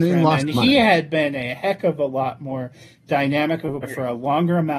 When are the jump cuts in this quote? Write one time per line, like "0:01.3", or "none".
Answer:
0:03.8